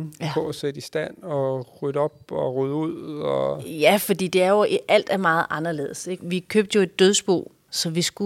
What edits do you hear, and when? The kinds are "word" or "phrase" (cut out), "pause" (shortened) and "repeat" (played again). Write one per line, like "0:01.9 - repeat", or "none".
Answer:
none